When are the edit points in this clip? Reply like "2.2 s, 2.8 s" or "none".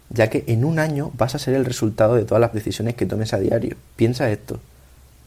2.5 s, 3.8 s